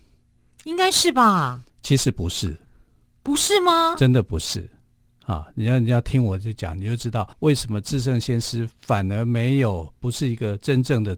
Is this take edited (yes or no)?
yes